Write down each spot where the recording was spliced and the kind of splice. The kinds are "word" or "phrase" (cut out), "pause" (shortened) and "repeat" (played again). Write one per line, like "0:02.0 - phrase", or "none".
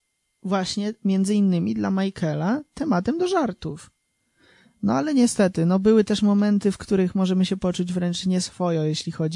none